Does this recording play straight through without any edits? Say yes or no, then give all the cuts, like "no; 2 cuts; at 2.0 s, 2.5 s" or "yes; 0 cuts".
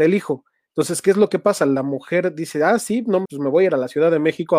no; 1 cut; at 3.2 s